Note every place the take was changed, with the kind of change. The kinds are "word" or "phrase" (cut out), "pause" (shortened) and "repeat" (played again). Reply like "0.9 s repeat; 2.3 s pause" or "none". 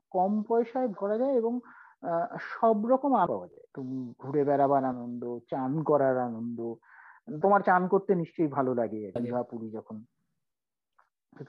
1.0 s word; 3.3 s word; 3.7 s word; 4.9 s phrase; 7.4 s word; 9.2 s word

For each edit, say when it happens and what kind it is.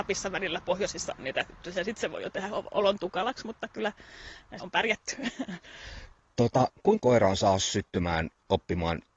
4.6 s word; 7.0 s word

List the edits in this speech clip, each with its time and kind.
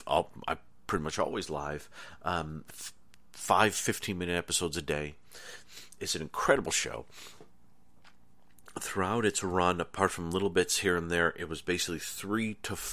none

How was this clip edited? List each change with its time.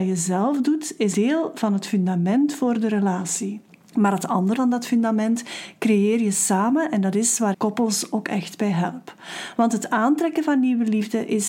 1.1 s word; 3.7 s pause; 4.6 s word; 7.5 s word

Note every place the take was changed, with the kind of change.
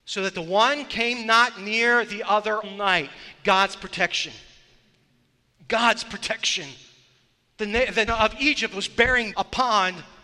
2.6 s word; 8.1 s word; 9.3 s word

